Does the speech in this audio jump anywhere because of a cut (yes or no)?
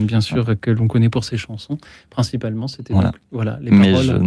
no